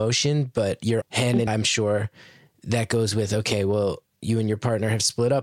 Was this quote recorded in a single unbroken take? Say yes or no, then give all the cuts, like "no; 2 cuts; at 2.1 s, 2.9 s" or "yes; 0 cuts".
no; 2 cuts; at 1.0 s, 1.5 s